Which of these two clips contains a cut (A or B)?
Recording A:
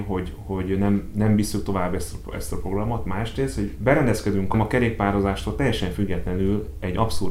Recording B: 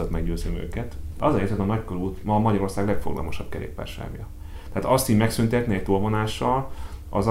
A